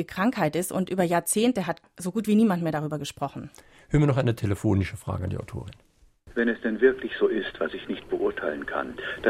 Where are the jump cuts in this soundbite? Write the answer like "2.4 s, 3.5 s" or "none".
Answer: none